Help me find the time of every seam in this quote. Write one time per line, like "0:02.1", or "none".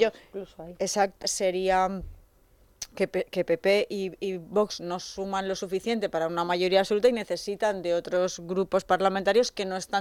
0:01.2